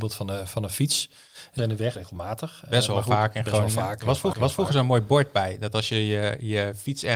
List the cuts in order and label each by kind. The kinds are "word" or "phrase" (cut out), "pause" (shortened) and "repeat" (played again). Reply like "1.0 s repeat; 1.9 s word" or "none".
1.6 s phrase; 1.9 s word; 4.3 s repeat

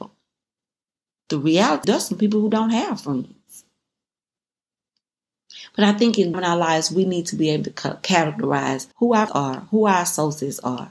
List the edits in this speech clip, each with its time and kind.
1.8 s word; 6.3 s phrase; 8.9 s pause; 9.3 s word

